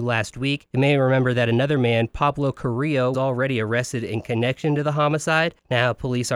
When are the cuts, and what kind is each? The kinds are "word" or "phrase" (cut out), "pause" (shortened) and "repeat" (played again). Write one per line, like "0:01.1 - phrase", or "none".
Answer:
0:03.1 - word